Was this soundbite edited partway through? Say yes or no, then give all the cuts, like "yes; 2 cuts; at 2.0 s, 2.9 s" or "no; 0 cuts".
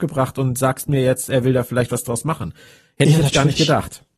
no; 0 cuts